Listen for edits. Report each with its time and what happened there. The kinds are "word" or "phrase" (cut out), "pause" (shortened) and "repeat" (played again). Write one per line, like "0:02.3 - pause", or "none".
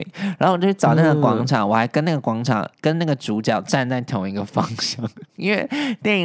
0:02.7 - pause